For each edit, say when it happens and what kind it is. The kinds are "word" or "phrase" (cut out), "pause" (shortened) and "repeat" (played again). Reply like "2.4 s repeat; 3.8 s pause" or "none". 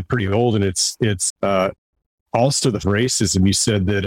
1.3 s word; 2.8 s word